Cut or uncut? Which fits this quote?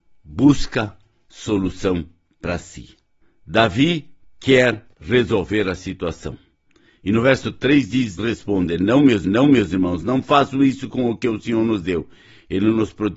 cut